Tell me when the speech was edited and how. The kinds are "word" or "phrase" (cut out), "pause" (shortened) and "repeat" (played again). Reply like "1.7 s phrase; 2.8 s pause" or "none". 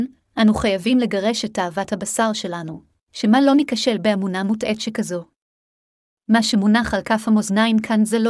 none